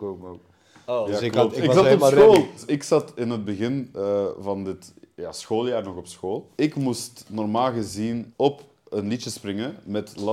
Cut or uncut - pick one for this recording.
uncut